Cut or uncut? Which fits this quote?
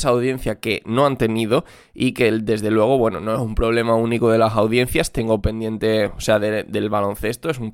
uncut